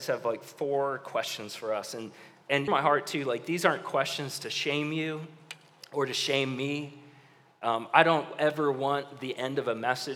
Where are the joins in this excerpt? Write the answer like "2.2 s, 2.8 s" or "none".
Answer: 2.7 s